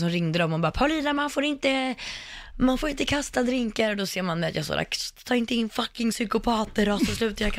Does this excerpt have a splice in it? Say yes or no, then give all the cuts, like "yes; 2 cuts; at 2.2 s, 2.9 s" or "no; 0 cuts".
no; 0 cuts